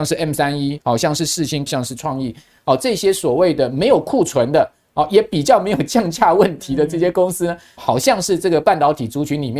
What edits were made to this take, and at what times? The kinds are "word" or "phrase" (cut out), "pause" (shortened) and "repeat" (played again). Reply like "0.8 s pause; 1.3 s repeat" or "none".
1.7 s word; 7.8 s word

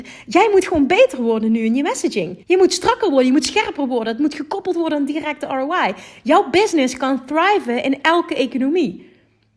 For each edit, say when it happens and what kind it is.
2.4 s pause

